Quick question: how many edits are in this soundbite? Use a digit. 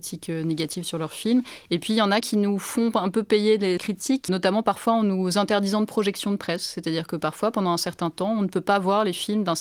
2